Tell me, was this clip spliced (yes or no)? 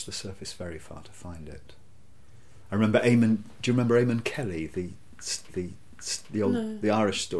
yes